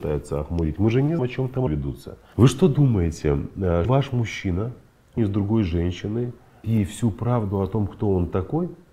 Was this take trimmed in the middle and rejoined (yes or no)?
yes